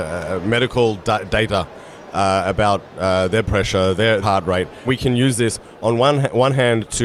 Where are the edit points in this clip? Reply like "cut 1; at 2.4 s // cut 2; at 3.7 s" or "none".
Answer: cut 1; at 3.5 s // cut 2; at 4.2 s // cut 3; at 4.9 s